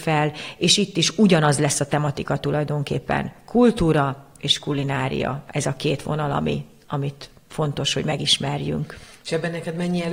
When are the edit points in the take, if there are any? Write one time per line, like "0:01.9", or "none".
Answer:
none